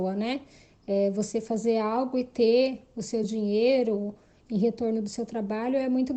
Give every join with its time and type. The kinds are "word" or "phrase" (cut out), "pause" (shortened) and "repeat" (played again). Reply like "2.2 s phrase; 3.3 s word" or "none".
none